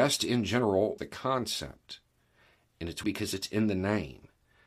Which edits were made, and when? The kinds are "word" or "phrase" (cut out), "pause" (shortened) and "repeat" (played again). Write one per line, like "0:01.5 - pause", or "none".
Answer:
0:01.0 - word
0:03.0 - word